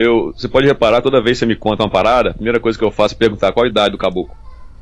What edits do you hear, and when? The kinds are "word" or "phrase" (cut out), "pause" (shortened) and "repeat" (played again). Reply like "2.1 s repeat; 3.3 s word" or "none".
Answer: none